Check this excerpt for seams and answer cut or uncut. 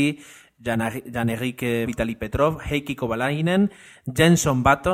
cut